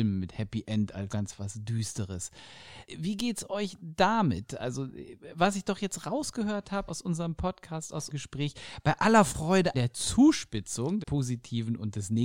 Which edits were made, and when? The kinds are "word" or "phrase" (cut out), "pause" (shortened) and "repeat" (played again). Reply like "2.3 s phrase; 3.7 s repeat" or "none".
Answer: 1.1 s word; 6.9 s word; 8.1 s word; 9.7 s word; 11.0 s word

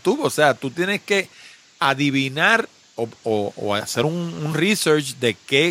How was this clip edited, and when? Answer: none

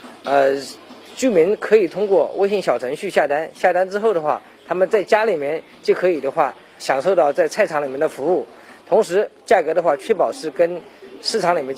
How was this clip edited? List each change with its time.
6.8 s word

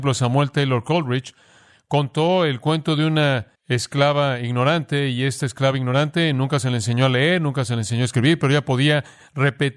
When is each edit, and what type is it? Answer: 3.6 s pause

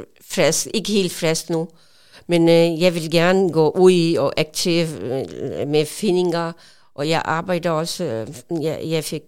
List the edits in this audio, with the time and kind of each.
none

